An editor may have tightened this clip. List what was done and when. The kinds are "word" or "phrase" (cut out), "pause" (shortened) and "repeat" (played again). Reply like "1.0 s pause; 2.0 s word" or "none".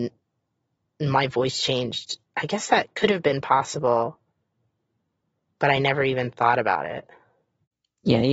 none